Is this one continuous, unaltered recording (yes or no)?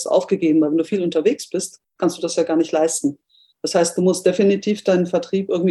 yes